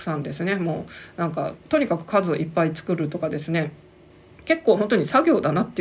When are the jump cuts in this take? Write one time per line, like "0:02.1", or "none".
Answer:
0:01.6